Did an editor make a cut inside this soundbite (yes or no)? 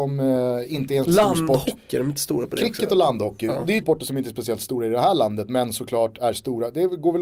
yes